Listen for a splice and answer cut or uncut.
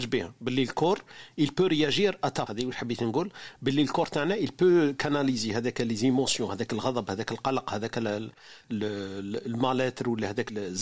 cut